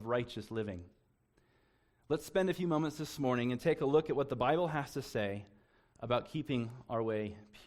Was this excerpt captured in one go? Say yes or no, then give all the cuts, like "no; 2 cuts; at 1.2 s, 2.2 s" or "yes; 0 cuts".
yes; 0 cuts